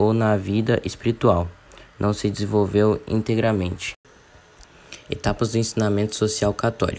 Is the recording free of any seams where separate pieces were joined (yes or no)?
yes